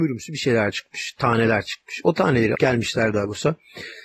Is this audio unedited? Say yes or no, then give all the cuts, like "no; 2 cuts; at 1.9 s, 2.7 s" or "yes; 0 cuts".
no; 1 cut; at 2.5 s